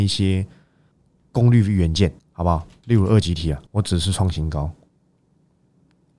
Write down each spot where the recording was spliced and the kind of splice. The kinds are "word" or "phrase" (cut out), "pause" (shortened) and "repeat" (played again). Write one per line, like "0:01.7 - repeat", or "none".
0:00.9 - pause
0:02.2 - pause
0:03.7 - pause